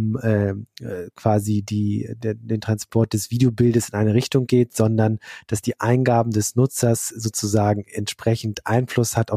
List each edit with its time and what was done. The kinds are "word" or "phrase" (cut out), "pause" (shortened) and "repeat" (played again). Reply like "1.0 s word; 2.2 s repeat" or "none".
none